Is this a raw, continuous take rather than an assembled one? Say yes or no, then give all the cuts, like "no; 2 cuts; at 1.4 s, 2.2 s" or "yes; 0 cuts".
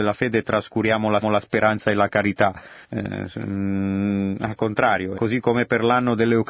no; 3 cuts; at 1.2 s, 2.8 s, 5.1 s